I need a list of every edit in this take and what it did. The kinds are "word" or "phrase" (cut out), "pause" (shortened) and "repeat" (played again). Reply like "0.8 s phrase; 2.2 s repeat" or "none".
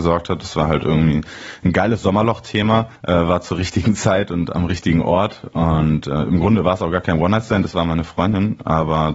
3.0 s pause